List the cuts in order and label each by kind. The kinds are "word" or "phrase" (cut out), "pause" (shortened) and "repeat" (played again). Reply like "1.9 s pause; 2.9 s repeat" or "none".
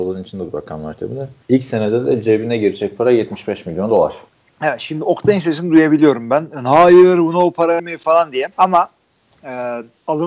1.4 s pause; 4.3 s pause; 7.8 s word; 8.5 s pause